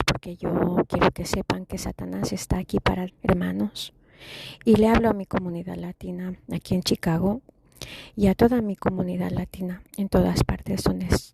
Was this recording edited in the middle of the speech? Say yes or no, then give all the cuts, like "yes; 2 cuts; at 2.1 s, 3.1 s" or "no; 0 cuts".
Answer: yes; 2 cuts; at 3.1 s, 9.9 s